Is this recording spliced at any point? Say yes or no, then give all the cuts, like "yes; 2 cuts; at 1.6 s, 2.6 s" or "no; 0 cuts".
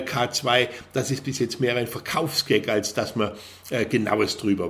no; 0 cuts